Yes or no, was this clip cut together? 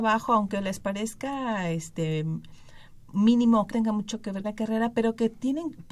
yes